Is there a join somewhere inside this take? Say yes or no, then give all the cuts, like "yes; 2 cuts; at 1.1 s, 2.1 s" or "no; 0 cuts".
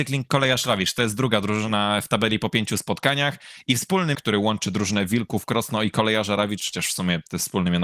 yes; 1 cut; at 4.1 s